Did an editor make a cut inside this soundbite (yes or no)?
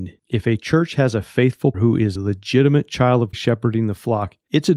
yes